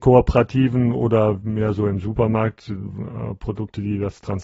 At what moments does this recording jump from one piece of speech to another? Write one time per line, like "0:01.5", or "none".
none